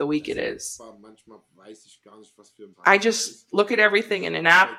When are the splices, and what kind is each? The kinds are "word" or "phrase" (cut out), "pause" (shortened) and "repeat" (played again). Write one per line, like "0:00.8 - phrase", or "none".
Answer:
0:02.7 - pause